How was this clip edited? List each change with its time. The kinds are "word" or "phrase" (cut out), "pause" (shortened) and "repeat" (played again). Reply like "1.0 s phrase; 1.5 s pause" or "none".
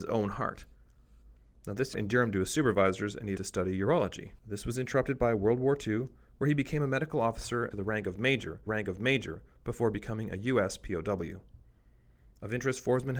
1.9 s word; 3.4 s phrase; 4.4 s pause; 7.7 s phrase; 8.7 s repeat